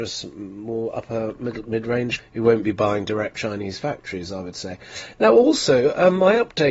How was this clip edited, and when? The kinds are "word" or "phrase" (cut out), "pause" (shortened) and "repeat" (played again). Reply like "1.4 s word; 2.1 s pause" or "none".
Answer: 2.2 s word; 3.3 s word